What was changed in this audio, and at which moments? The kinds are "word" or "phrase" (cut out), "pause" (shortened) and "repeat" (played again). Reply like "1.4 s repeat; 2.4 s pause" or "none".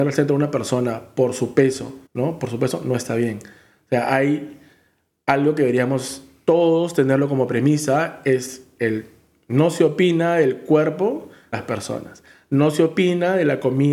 2.1 s pause; 11.5 s word